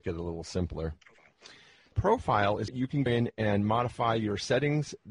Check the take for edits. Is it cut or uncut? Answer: cut